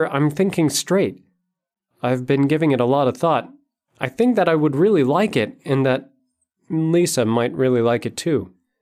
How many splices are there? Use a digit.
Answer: 0